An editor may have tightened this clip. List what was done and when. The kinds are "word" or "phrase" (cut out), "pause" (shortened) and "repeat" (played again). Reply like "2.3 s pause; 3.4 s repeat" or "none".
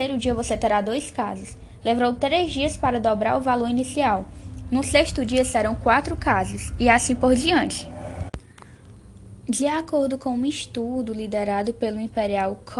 none